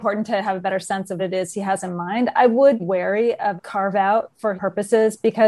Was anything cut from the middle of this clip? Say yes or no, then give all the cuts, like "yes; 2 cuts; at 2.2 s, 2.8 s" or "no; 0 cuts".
yes; 4 cuts; at 1.2 s, 2.8 s, 3.6 s, 4.6 s